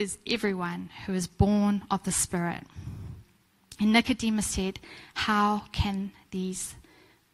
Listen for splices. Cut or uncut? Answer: uncut